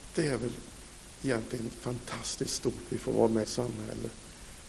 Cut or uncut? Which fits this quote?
cut